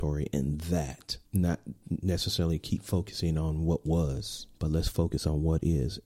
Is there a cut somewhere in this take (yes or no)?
yes